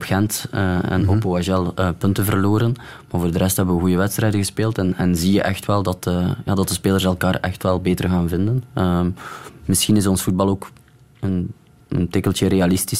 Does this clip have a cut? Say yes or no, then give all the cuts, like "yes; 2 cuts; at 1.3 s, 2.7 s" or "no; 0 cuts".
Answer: no; 0 cuts